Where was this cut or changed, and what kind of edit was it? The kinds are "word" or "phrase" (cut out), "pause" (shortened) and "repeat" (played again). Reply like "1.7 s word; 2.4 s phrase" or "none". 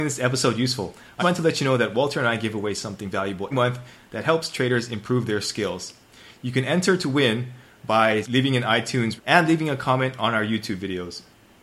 1.2 s word; 3.5 s word; 8.2 s word; 9.2 s word